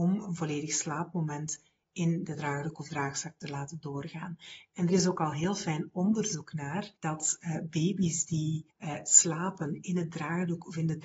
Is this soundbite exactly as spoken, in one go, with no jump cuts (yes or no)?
no